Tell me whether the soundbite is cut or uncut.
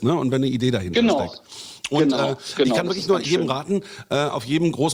uncut